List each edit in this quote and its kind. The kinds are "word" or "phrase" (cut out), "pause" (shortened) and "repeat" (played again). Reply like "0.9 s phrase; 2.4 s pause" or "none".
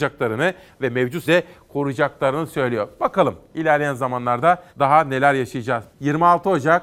1.3 s word; 4.7 s pause; 5.9 s pause